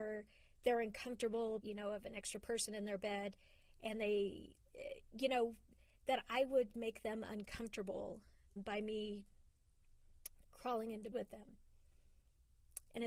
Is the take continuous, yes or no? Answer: no